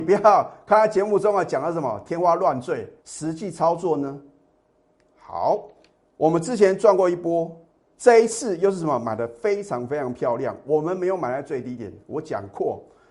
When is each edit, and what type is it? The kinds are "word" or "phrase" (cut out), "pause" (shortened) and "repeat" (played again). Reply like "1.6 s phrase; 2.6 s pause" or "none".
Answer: 3.0 s pause; 5.9 s pause; 7.8 s pause

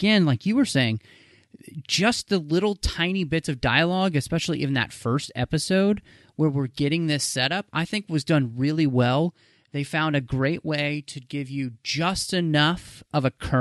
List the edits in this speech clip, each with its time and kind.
none

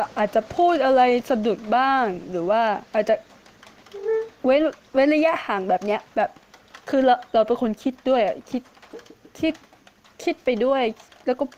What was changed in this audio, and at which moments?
2.9 s pause; 6.1 s pause; 6.8 s pause

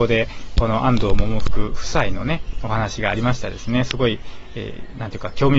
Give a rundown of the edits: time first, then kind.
none

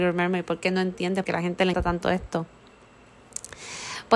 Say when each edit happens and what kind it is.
1.2 s word; 1.7 s word

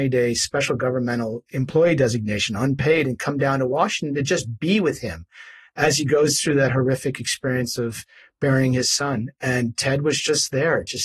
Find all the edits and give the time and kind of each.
none

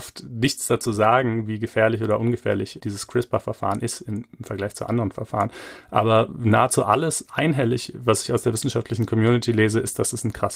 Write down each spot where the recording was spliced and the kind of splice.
2.8 s word

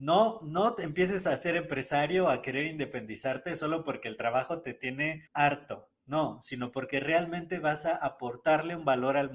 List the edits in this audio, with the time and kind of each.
5.3 s pause

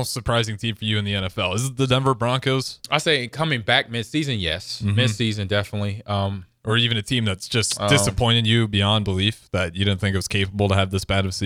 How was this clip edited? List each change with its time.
none

